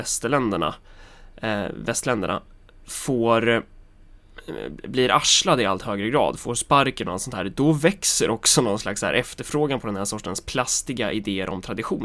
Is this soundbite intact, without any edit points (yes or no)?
yes